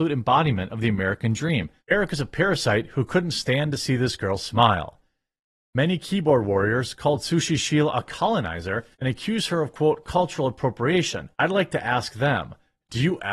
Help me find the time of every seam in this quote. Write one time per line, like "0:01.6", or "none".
0:01.8
0:08.9
0:11.3